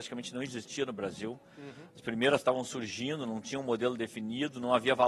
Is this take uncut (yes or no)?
yes